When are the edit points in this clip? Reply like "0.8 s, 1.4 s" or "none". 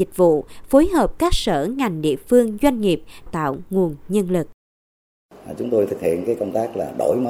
3.3 s